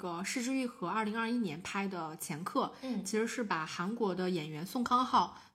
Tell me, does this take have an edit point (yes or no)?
no